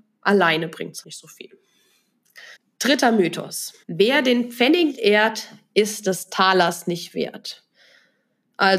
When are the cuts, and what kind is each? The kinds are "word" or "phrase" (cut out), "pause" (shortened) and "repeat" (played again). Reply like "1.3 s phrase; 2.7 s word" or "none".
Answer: 1.0 s word; 2.5 s pause; 3.8 s pause; 4.9 s word